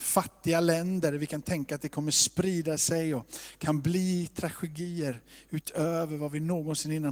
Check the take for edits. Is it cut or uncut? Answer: uncut